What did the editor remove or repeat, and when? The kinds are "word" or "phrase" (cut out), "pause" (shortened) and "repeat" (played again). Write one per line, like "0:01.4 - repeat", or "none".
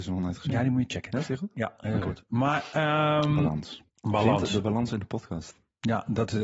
0:03.9 - pause